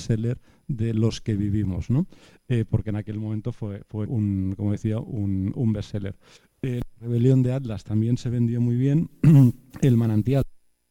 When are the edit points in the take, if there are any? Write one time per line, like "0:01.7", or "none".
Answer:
0:04.1
0:06.4
0:09.7